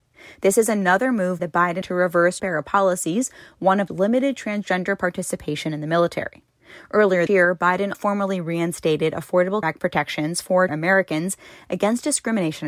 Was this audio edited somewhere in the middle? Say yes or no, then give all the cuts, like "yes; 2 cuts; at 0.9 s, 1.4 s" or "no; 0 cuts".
yes; 8 cuts; at 1.4 s, 1.8 s, 2.4 s, 3.9 s, 7.3 s, 7.9 s, 9.6 s, 10.7 s